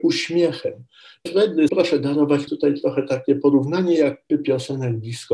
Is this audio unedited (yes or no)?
no